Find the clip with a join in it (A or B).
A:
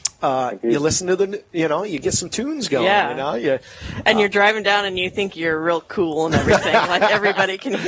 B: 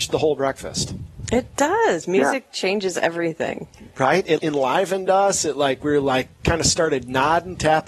B